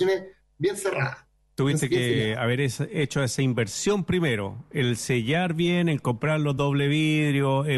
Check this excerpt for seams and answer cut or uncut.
uncut